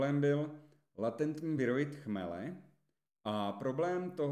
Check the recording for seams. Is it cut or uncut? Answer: uncut